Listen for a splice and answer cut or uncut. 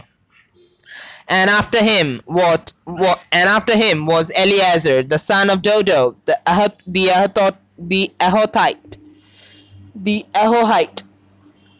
uncut